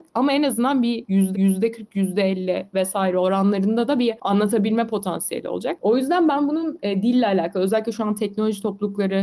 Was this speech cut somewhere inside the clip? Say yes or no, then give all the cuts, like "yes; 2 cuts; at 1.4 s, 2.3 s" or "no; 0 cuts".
yes; 1 cut; at 1.3 s